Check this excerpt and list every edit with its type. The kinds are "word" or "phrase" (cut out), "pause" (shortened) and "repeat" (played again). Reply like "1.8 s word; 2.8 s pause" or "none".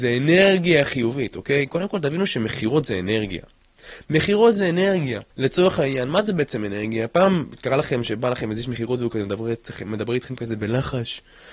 5.3 s pause

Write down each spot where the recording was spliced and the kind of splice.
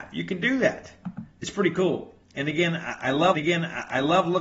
1.3 s pause; 3.3 s repeat

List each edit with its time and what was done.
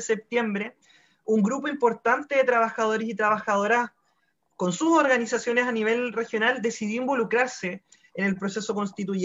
none

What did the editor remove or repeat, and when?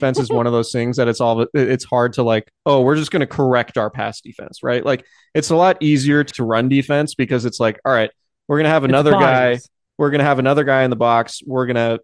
6.3 s word

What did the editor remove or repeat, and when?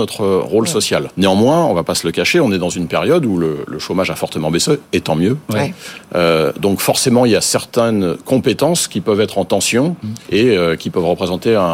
1.1 s pause; 4.8 s pause; 10.2 s pause

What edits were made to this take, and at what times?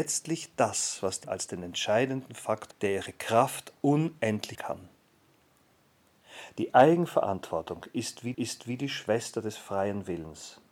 1.2 s word; 2.7 s word; 4.5 s word; 8.3 s repeat

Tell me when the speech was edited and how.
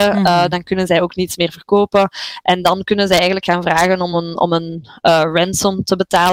none

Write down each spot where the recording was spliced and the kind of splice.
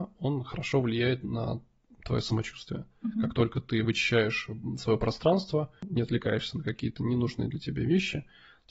none

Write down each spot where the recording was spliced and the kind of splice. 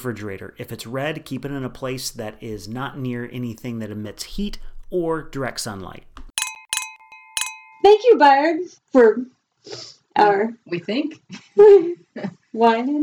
8.8 s pause

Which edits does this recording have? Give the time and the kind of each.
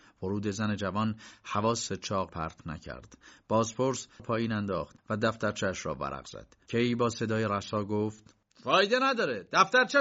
1.9 s word; 2.3 s word; 4.2 s phrase; 5.0 s pause; 8.4 s pause

